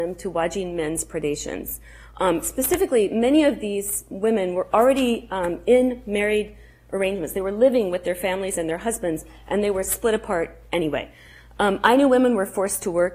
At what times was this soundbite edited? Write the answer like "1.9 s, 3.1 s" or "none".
none